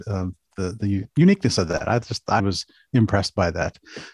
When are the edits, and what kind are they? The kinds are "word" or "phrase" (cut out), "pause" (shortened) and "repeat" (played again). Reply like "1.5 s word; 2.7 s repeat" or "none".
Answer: 2.4 s word